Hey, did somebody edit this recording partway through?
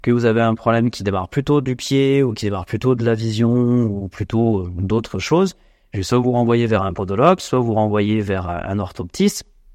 no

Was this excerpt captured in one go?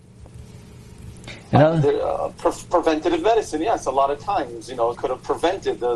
no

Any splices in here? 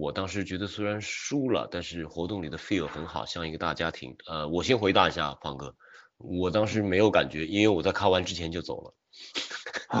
yes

